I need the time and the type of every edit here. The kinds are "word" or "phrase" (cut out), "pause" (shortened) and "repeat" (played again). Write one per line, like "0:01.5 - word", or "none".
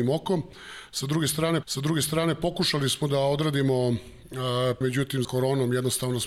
0:01.6 - repeat
0:04.8 - word
0:05.2 - phrase